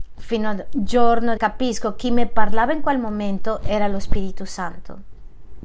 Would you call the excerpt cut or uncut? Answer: cut